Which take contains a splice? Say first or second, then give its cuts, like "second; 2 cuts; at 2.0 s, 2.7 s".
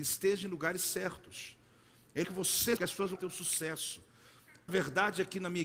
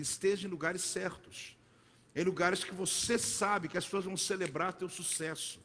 first; 4 cuts; at 2.2 s, 2.8 s, 3.2 s, 4.7 s